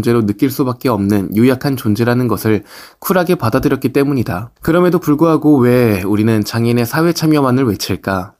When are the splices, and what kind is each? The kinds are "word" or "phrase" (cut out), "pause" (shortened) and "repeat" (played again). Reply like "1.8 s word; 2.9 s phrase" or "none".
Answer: 4.6 s pause